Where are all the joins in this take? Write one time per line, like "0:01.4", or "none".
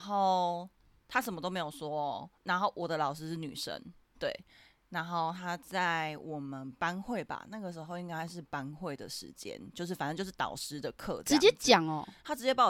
0:02.4
0:04.1

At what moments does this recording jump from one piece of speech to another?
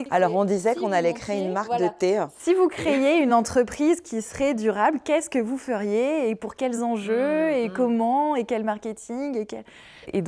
none

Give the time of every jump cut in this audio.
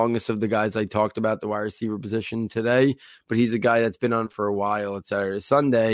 0:04.3

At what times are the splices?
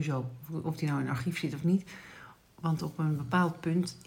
none

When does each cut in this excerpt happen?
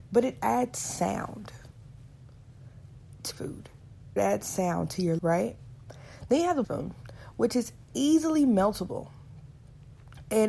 0:03.3
0:04.2
0:05.2
0:06.6

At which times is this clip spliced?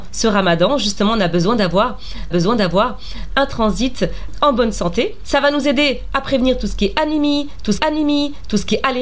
0:02.3
0:07.8

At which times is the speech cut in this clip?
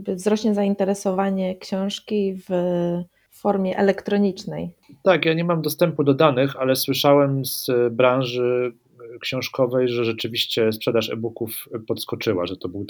none

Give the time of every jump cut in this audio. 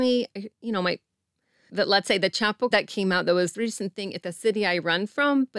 0:01.7
0:02.7
0:03.5
0:04.2

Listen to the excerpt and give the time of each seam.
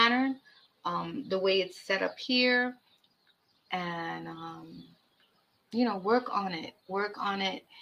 none

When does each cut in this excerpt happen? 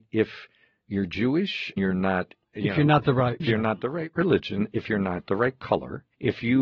0:01.8
0:03.4

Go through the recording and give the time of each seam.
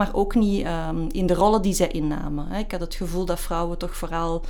none

